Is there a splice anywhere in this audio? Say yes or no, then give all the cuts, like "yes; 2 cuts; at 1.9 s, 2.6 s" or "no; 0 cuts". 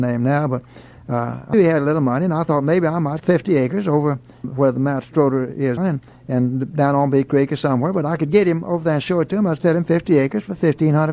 yes; 4 cuts; at 1.5 s, 3.2 s, 4.4 s, 5.8 s